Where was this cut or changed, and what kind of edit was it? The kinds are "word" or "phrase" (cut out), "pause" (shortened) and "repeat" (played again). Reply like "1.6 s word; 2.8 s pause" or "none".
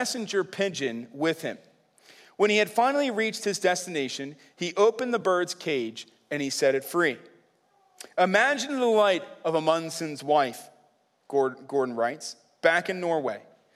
none